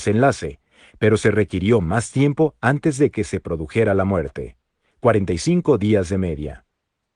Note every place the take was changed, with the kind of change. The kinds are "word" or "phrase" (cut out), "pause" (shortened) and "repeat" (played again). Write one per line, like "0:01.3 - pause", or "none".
none